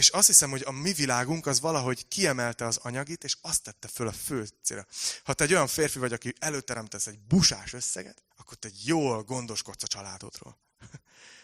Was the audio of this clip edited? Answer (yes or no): yes